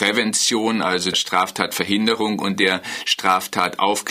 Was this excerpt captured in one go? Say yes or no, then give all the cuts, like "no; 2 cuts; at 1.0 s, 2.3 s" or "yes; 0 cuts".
no; 1 cut; at 1.1 s